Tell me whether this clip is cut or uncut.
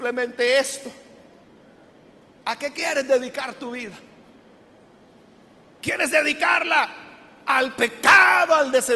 uncut